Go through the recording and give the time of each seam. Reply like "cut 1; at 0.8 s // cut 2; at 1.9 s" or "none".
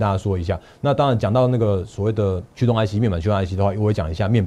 cut 1; at 2.5 s